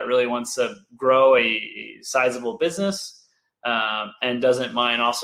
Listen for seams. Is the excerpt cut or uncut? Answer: uncut